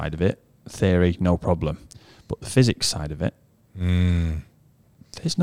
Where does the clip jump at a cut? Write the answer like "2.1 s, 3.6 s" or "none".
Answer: none

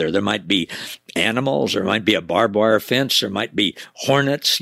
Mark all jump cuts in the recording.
none

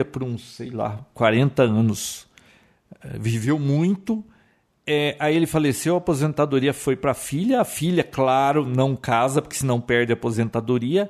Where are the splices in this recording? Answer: none

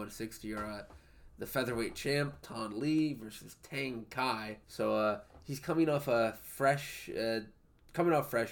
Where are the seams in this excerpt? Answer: 4.6 s

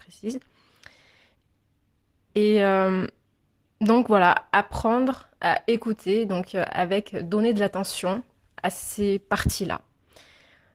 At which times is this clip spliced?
none

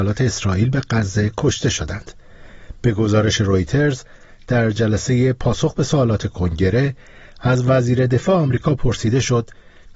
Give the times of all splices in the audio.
none

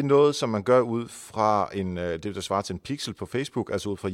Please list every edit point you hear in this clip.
none

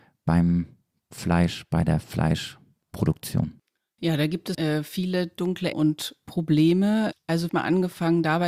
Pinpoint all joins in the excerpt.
4.5 s, 5.7 s, 7.5 s

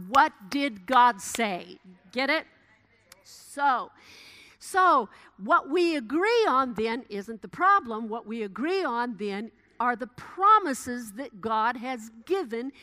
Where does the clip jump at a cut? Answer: none

